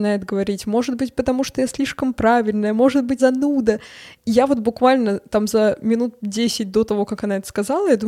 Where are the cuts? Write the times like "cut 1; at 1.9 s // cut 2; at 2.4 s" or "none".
cut 1; at 3.2 s